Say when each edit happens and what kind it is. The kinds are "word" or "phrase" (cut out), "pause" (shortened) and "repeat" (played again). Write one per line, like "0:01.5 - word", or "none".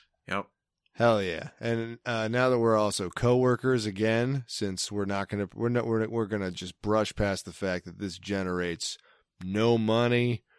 none